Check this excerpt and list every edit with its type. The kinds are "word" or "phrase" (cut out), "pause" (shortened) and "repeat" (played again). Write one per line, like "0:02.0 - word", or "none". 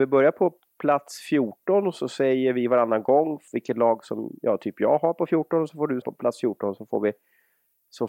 0:03.5 - pause
0:06.0 - word